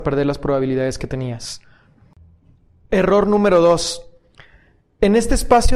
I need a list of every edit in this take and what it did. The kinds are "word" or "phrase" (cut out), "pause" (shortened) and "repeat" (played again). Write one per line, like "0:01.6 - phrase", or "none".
none